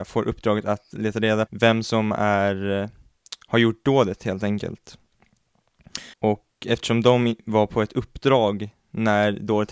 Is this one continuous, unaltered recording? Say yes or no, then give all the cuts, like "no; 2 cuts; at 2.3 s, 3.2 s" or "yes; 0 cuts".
no; 2 cuts; at 1.5 s, 6.1 s